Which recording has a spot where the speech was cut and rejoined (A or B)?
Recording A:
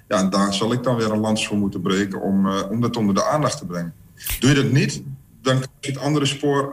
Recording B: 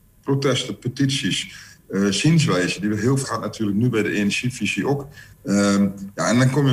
B